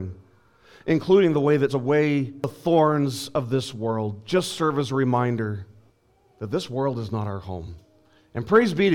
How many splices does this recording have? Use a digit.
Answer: 2